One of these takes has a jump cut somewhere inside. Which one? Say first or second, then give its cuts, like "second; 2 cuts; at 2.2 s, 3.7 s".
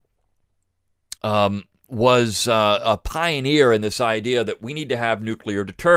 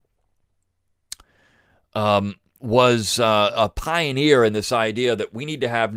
first; 1 cut; at 1.2 s